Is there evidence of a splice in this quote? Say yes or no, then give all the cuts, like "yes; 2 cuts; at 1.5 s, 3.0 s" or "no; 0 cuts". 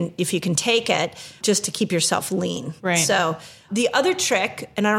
yes; 3 cuts; at 1.4 s, 2.8 s, 3.7 s